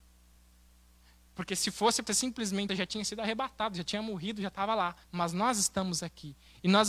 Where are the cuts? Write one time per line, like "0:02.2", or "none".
0:02.1
0:02.7
0:05.0